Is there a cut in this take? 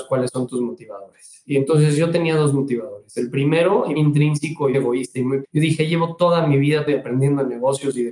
yes; 4 cuts; at 4.0 s, 4.7 s, 5.4 s, 6.9 s

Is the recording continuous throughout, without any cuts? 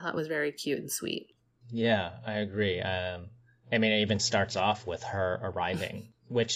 yes; 0 cuts

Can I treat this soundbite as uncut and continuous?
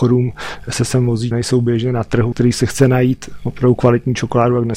no; 2 cuts; at 1.3 s, 2.3 s

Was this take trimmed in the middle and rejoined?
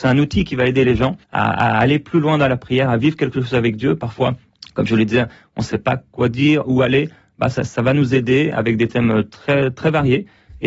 yes; 2 cuts; at 1.2 s, 4.5 s

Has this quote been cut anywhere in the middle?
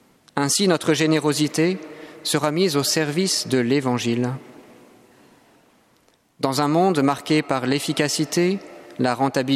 no; 0 cuts

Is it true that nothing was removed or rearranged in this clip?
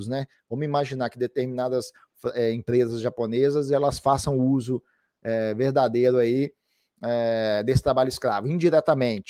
yes; 0 cuts

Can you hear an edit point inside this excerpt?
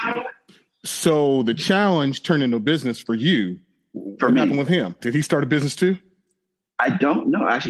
no; 0 cuts

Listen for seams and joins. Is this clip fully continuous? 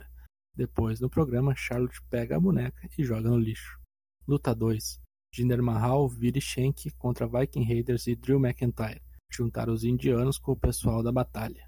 yes; 0 cuts

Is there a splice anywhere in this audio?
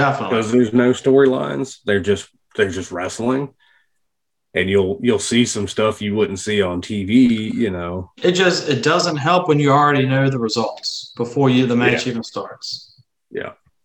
no; 0 cuts

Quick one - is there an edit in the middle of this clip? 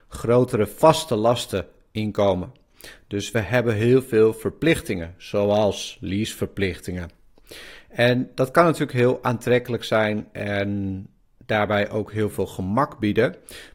no; 0 cuts

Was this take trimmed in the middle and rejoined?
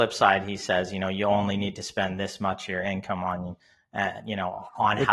no; 0 cuts

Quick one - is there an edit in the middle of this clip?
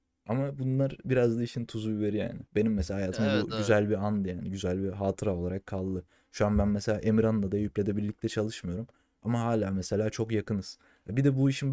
yes; 1 cut; at 2.5 s

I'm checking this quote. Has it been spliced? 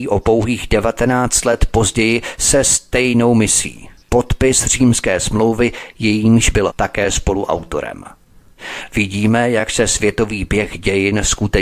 yes; 2 cuts; at 4.0 s, 6.7 s

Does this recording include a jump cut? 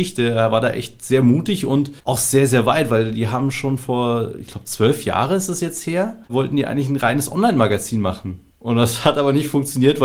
yes; 3 cuts; at 2.0 s, 6.2 s, 8.5 s

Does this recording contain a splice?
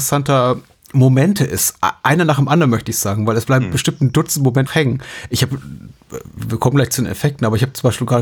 yes; 1 cut; at 4.7 s

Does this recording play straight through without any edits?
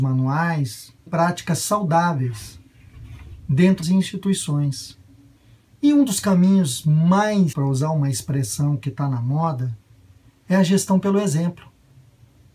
no; 4 cuts; at 1.1 s, 3.8 s, 5.4 s, 7.5 s

